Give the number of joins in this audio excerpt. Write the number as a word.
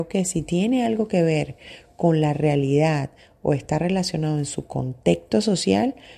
zero